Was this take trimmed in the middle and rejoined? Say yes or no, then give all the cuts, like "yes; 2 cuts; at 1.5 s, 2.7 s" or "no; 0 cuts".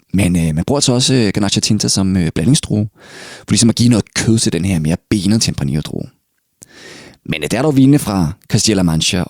no; 0 cuts